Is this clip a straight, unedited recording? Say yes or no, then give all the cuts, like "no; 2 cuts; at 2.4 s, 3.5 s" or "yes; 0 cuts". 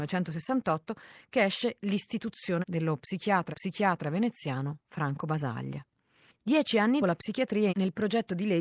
no; 4 cuts; at 2.6 s, 3.5 s, 7.0 s, 7.7 s